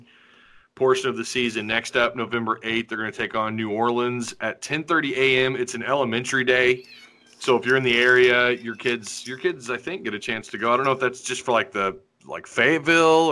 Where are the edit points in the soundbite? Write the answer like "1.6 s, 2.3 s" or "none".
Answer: none